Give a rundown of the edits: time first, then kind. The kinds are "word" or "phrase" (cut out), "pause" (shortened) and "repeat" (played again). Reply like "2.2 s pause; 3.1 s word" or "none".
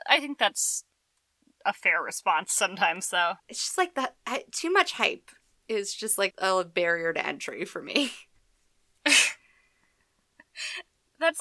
3.4 s pause; 6.3 s word